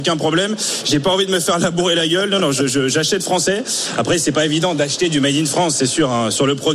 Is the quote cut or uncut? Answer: uncut